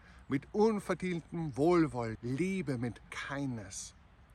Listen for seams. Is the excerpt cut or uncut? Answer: cut